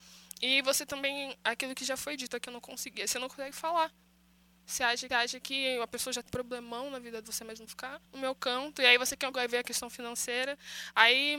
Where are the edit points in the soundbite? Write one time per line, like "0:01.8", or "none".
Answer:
0:02.5
0:05.1
0:06.3
0:07.2
0:07.7
0:08.0
0:09.3